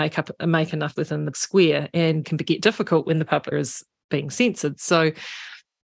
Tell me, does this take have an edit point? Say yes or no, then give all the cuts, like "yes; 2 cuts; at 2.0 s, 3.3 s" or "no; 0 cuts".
yes; 4 cuts; at 1.0 s, 1.3 s, 2.2 s, 3.5 s